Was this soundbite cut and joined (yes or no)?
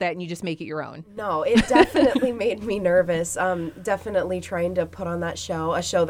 no